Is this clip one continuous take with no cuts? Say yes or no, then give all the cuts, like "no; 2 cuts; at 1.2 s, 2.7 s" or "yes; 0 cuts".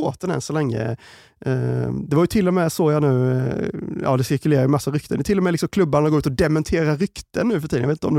yes; 0 cuts